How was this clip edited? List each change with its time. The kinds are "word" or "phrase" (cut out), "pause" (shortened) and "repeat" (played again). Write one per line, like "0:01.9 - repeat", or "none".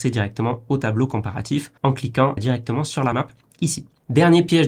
0:01.8 - pause
0:02.4 - word
0:03.1 - word